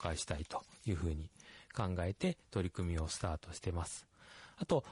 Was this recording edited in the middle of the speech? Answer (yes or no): no